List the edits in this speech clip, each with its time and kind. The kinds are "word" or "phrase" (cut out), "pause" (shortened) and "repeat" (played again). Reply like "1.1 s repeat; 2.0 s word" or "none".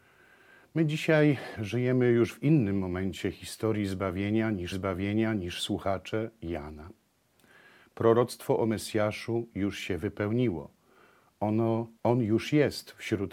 4.7 s repeat; 12.0 s pause